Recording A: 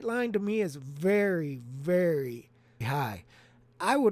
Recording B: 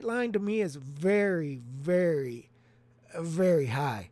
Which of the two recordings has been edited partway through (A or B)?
A